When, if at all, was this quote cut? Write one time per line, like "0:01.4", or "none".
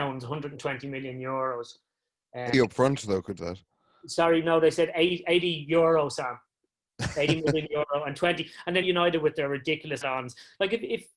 0:02.5
0:03.4
0:08.8
0:10.0